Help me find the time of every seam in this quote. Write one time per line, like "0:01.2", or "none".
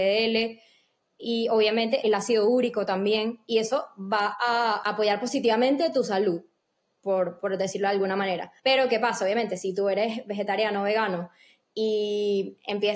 0:08.6